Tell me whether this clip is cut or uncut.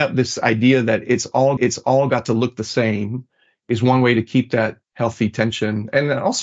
cut